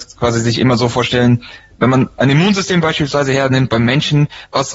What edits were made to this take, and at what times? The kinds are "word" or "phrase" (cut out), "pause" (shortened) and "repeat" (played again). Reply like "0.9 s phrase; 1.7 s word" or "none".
none